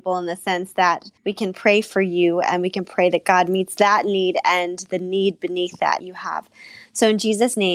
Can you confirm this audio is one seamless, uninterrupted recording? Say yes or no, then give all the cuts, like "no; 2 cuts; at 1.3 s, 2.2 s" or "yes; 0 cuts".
no; 2 cuts; at 1.2 s, 6.0 s